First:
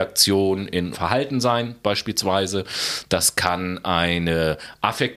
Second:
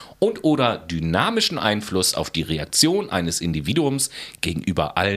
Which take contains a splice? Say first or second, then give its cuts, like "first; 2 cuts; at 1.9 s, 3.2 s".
first; 1 cut; at 0.9 s